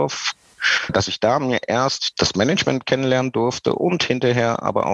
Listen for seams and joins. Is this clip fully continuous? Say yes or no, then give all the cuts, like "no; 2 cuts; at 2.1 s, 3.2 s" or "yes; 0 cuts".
yes; 0 cuts